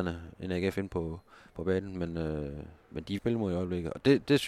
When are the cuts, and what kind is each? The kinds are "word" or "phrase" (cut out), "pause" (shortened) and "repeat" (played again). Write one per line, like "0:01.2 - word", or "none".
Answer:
0:03.2 - phrase